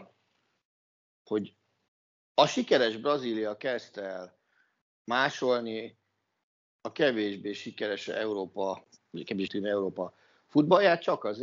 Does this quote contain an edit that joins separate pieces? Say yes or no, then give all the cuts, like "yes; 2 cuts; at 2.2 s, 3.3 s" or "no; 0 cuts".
yes; 1 cut; at 9.5 s